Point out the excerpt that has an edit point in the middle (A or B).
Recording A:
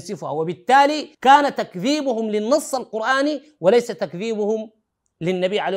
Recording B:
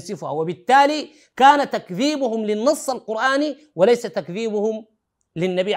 A